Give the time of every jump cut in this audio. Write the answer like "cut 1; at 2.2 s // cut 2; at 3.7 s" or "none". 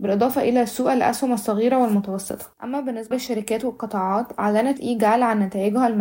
cut 1; at 2.5 s // cut 2; at 3.1 s // cut 3; at 4.8 s